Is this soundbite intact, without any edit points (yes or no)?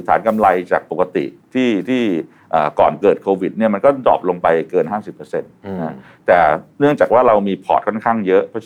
yes